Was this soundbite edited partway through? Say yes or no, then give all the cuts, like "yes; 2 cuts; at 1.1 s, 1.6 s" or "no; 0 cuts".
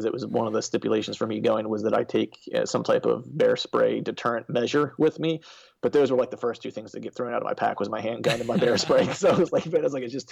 no; 0 cuts